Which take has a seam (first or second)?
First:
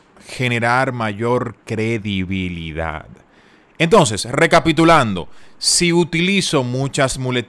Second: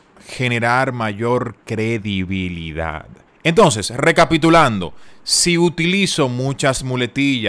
second